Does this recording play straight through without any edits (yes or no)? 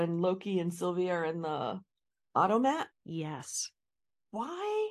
no